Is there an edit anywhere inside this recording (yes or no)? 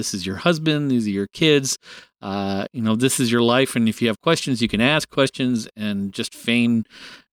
no